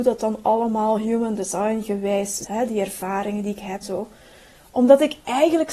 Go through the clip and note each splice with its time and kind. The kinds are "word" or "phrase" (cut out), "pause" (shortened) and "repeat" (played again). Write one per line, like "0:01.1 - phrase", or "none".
0:02.4 - word
0:03.8 - word

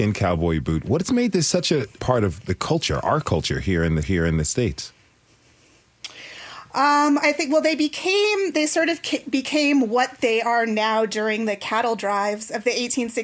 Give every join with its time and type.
0:02.0 - word
0:04.0 - repeat

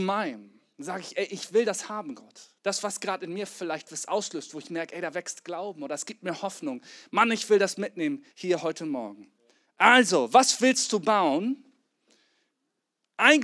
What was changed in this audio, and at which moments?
0:08.3 - pause
0:09.5 - pause

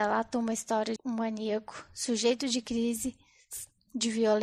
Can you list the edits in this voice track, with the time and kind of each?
0:01.0 - word

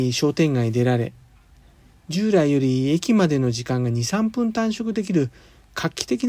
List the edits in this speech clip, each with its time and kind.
none

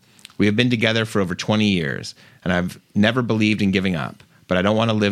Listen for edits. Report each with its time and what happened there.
none

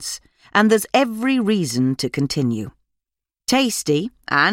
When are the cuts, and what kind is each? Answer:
none

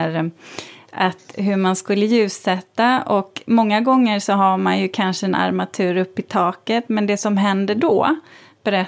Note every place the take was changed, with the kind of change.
none

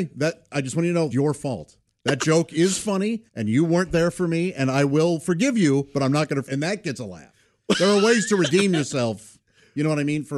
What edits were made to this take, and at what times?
0:01.1 - word
0:03.3 - pause
0:06.5 - word

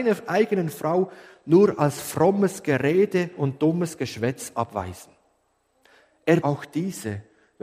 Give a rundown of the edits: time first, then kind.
0:06.4 - word

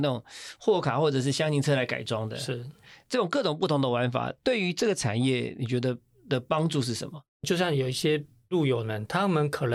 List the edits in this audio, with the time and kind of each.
0:07.3 - pause

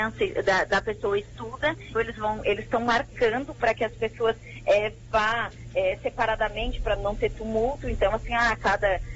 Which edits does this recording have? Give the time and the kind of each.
0:02.0 - word
0:07.0 - word

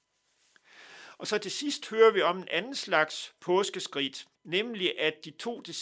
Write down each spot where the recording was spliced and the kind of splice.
0:04.3 - pause

